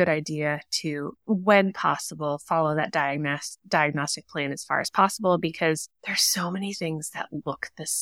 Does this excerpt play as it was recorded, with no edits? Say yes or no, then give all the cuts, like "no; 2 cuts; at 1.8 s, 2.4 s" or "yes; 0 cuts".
no; 2 cuts; at 1.2 s, 6.0 s